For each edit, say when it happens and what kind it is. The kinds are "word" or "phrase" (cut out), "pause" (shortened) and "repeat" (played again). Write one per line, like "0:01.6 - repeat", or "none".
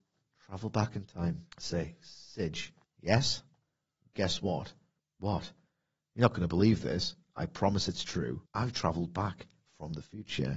0:01.5 - pause
0:02.8 - pause
0:05.0 - pause
0:08.5 - pause